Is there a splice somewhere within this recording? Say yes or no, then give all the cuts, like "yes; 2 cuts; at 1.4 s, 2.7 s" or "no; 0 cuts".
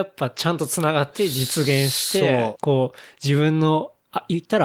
yes; 1 cut; at 2.5 s